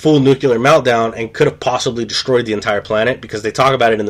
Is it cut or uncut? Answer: uncut